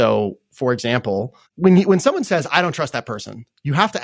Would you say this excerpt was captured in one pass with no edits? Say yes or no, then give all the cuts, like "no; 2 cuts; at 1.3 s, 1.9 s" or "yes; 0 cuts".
no; 1 cut; at 1.5 s